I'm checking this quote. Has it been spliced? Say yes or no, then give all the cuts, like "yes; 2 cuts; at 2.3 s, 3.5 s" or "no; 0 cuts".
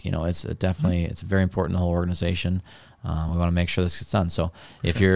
no; 0 cuts